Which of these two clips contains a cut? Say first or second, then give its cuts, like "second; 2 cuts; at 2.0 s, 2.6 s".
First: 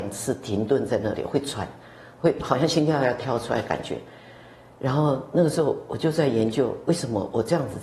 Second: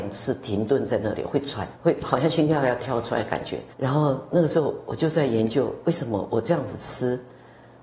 second; 2 cuts; at 1.8 s, 3.7 s